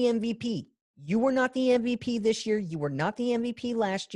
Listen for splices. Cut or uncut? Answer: uncut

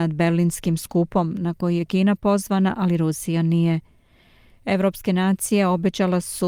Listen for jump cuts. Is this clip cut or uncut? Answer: uncut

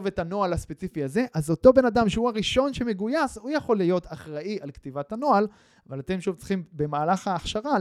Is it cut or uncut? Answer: uncut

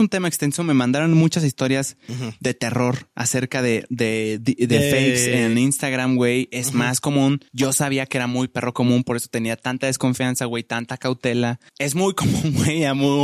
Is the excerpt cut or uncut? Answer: cut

